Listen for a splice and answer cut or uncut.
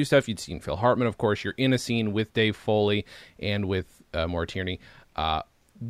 uncut